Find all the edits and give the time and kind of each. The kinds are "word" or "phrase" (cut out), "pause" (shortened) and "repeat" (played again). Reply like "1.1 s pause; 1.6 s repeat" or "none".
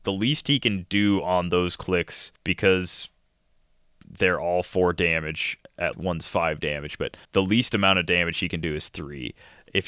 2.4 s pause; 5.9 s word; 7.2 s pause